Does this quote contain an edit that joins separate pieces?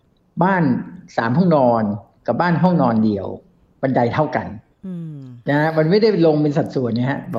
no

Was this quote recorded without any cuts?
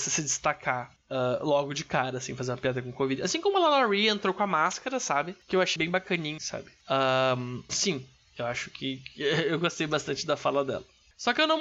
no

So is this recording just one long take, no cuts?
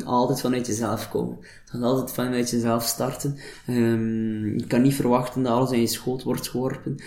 yes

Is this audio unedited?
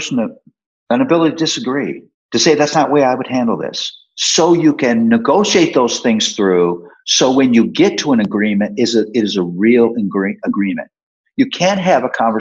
no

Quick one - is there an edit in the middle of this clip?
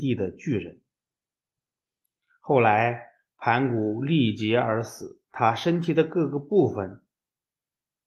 yes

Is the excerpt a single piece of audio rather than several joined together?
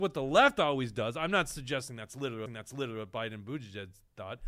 no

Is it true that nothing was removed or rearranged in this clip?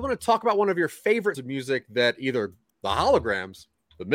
no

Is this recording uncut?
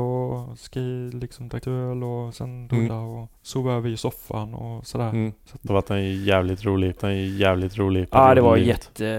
no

